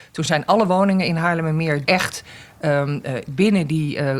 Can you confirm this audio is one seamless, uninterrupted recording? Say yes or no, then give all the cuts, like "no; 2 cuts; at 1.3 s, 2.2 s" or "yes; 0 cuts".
no; 1 cut; at 1.8 s